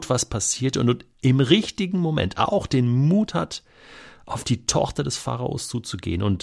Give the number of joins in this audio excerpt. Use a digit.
0